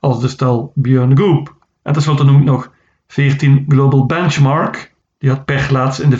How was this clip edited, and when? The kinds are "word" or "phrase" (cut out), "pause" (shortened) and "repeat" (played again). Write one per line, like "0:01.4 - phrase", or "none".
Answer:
none